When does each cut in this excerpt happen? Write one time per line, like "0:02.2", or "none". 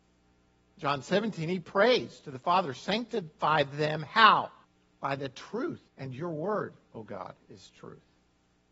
0:04.6
0:05.9